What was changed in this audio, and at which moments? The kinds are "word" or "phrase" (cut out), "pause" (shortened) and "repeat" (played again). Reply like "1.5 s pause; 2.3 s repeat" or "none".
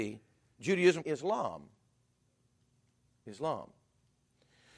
1.0 s phrase